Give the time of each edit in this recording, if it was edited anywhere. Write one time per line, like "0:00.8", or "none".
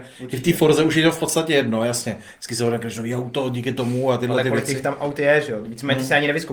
none